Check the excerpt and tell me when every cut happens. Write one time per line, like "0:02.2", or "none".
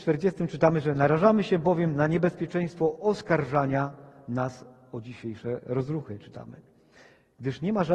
none